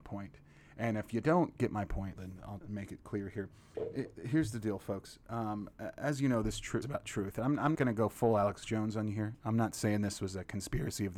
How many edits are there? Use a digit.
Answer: 4